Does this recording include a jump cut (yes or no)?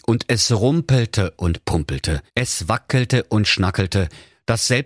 yes